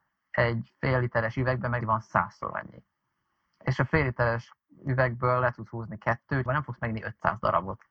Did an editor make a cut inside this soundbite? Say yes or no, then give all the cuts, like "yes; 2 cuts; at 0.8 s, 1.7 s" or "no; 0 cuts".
yes; 2 cuts; at 1.8 s, 6.5 s